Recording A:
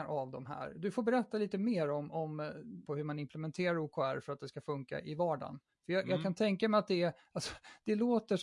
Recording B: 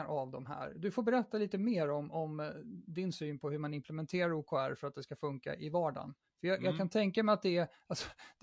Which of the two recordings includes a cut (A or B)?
A